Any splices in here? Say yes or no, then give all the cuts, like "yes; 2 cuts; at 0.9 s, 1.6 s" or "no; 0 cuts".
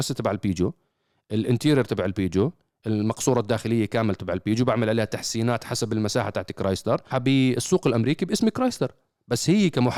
yes; 1 cut; at 7.1 s